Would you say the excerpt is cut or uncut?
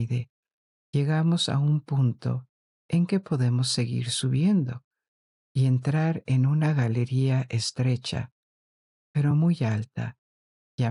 uncut